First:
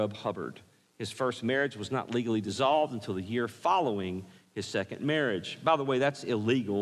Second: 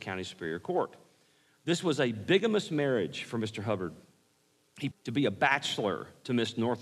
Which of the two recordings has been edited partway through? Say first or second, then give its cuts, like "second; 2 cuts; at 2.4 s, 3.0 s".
second; 1 cut; at 4.9 s